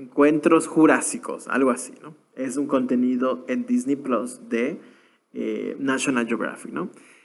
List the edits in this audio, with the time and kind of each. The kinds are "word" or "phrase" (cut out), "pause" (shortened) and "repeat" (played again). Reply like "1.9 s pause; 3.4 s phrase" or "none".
none